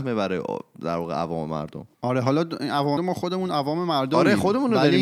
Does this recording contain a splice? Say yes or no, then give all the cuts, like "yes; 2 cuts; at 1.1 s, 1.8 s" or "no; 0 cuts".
yes; 2 cuts; at 1.9 s, 3.0 s